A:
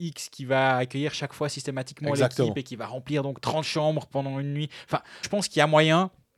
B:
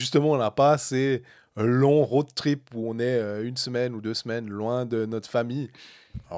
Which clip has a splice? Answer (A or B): A